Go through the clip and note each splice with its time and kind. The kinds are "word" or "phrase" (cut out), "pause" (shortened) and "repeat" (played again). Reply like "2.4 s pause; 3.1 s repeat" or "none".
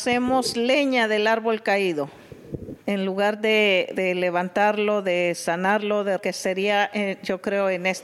2.8 s pause; 4.0 s word; 6.2 s word